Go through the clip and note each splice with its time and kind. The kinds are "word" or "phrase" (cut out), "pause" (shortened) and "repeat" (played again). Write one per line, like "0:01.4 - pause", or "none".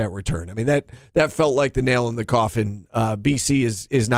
none